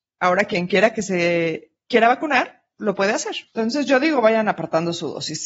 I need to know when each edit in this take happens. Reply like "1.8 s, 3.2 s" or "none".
3.5 s